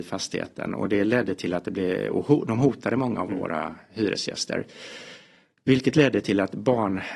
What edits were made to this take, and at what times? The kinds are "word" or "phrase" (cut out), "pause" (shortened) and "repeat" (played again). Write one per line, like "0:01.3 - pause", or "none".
none